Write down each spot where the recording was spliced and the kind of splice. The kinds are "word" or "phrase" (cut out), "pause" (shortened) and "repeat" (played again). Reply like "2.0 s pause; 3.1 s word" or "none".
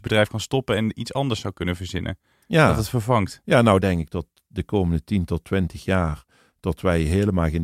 none